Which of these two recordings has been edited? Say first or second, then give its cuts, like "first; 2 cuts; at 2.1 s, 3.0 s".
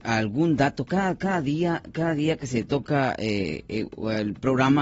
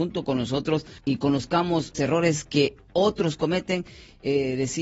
second; 2 cuts; at 1.0 s, 1.9 s